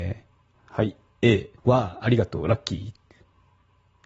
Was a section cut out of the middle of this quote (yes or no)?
yes